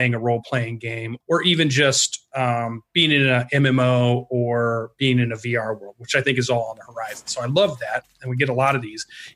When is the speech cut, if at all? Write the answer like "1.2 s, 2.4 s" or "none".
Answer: 1.2 s